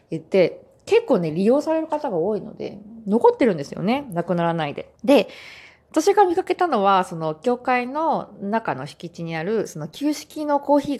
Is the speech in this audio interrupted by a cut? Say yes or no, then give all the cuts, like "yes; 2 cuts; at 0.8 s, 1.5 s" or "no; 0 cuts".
yes; 1 cut; at 5.0 s